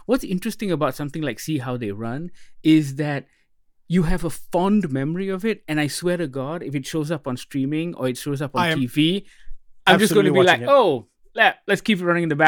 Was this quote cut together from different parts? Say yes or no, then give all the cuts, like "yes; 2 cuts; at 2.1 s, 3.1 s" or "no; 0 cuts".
no; 0 cuts